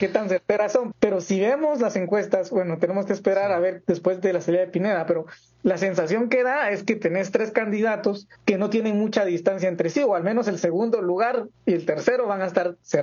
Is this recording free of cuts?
no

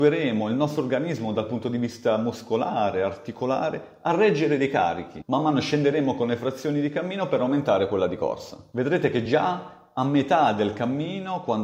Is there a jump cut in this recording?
no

